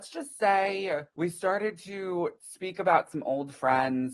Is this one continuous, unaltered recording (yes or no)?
no